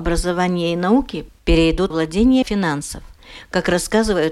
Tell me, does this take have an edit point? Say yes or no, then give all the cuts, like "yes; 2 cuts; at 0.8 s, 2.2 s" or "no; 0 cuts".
yes; 2 cuts; at 1.9 s, 2.4 s